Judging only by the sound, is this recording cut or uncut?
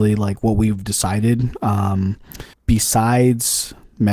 cut